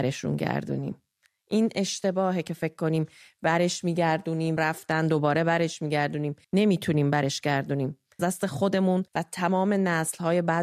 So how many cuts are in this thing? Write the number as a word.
four